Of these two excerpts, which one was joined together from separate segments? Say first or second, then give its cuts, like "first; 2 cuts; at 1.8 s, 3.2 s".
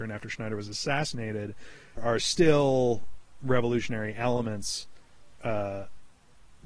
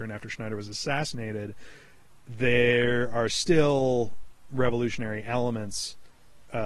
first; 1 cut; at 2.0 s